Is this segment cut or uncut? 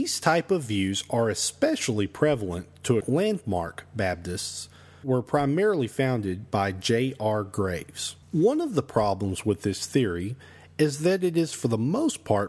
cut